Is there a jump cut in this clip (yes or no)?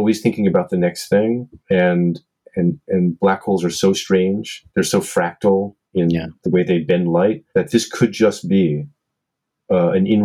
yes